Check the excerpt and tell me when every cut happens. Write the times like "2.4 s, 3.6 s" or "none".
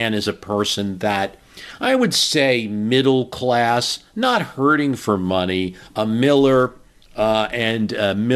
none